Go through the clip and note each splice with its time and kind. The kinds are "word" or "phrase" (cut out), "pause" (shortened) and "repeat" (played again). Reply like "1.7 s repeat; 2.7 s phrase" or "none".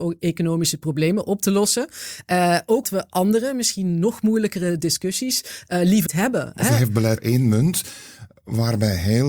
2.8 s word; 6.1 s word; 7.2 s word